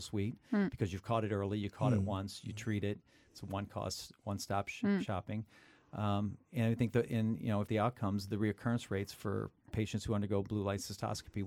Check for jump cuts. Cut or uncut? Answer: cut